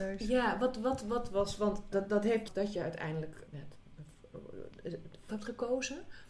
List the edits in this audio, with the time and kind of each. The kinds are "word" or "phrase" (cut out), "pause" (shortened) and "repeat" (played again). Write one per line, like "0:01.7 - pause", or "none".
0:01.9 - word
0:02.5 - phrase
0:03.5 - word
0:05.3 - word